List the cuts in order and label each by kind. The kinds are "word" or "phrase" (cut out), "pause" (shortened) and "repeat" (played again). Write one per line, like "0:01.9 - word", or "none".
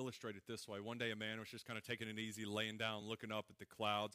none